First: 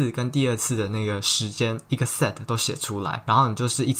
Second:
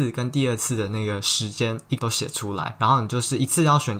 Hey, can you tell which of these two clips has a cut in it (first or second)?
second